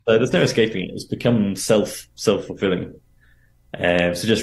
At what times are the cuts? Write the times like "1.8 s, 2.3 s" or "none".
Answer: none

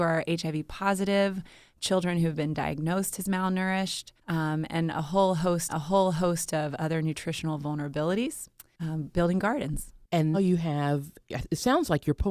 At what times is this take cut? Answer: 4.2 s, 5.7 s, 10.3 s

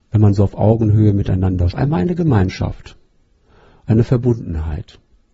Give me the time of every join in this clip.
1.7 s

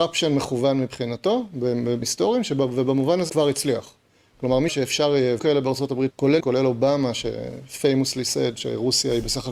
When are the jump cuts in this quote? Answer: 2.0 s, 3.3 s, 4.7 s, 5.4 s, 6.1 s, 6.4 s

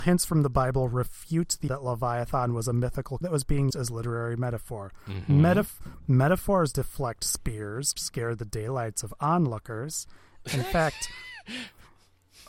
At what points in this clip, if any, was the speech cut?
1.7 s, 3.2 s, 3.7 s, 6.7 s, 8.0 s

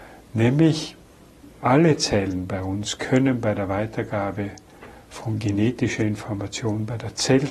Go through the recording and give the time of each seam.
1.5 s

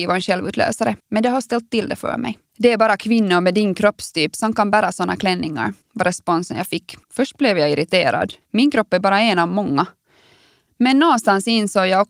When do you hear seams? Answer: 1.0 s, 2.5 s, 5.8 s, 7.0 s, 8.4 s

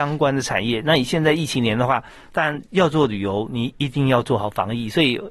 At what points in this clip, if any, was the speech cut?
none

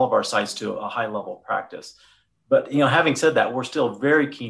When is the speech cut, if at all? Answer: none

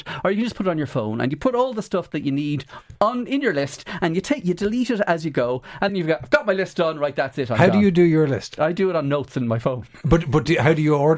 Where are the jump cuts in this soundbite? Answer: 5.9 s

